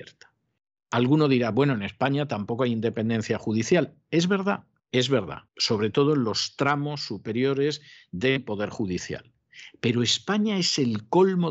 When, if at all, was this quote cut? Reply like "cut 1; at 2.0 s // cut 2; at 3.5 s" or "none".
cut 1; at 4.8 s // cut 2; at 5.5 s